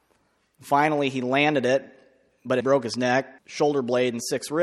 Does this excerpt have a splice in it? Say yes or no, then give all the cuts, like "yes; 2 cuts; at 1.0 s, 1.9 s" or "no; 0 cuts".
yes; 2 cuts; at 2.6 s, 3.4 s